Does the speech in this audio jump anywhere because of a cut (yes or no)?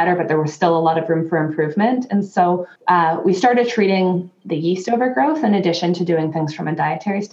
yes